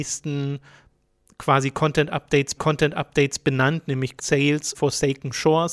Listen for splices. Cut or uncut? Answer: cut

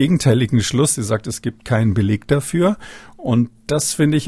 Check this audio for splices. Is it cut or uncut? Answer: uncut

